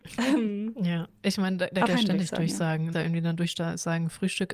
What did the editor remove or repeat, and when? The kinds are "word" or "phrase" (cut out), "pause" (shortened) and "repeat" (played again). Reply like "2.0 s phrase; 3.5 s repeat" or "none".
1.9 s word; 2.9 s phrase